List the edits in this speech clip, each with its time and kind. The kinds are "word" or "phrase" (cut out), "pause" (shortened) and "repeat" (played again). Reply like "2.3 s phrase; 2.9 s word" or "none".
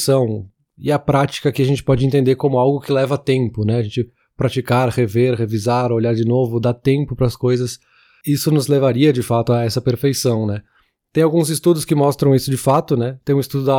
none